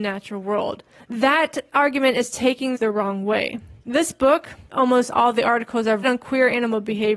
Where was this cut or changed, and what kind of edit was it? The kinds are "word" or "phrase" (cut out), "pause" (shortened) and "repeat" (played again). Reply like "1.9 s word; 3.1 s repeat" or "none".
1.0 s pause; 2.7 s phrase; 4.7 s word; 6.0 s word